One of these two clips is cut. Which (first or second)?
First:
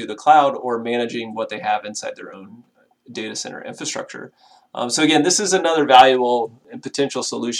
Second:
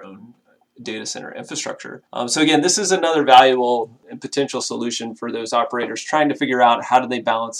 second